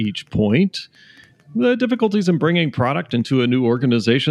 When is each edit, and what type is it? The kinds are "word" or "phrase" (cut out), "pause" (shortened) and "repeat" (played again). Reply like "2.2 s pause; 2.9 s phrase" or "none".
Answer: none